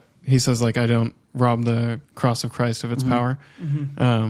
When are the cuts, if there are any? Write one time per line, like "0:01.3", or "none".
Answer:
0:02.0